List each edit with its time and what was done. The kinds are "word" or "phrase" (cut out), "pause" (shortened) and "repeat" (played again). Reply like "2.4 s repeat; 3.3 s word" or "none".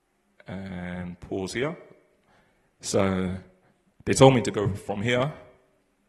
none